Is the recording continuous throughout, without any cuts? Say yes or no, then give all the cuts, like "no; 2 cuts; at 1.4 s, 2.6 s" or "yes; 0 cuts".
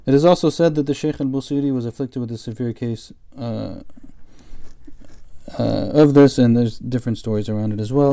yes; 0 cuts